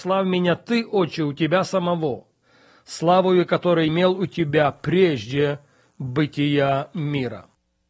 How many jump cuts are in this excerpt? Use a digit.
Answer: 1